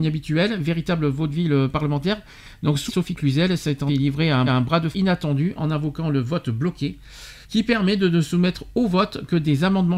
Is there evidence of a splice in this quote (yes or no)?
yes